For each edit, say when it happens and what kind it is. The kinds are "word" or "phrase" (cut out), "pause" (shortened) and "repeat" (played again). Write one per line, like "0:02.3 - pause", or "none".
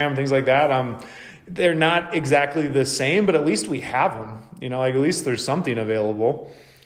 none